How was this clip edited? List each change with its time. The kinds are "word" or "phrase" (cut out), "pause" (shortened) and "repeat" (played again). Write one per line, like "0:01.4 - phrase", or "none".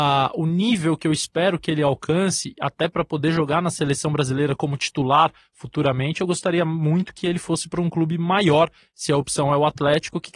none